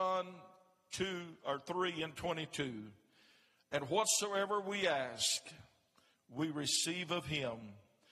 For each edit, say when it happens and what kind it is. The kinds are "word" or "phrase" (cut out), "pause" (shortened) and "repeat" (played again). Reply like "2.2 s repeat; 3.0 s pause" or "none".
none